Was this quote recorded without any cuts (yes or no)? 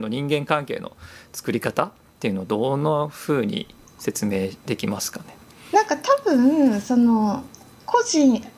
yes